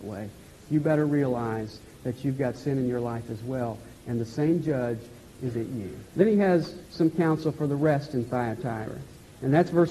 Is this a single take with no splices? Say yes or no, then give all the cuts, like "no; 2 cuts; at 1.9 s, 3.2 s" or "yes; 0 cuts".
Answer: no; 3 cuts; at 5.5 s, 6.1 s, 6.9 s